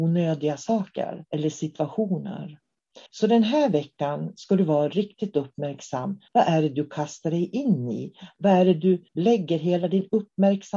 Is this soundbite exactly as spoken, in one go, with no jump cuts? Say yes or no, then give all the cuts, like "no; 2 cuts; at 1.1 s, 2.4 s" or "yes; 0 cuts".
no; 4 cuts; at 1.3 s, 3.1 s, 6.3 s, 9.1 s